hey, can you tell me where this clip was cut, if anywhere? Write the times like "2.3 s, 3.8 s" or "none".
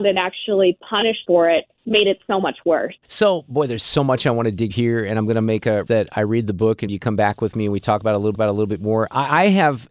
1.2 s, 1.7 s, 3.0 s, 4.7 s, 5.9 s, 6.9 s, 8.3 s